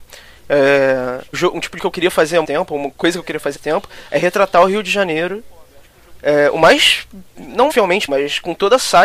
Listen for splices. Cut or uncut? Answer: cut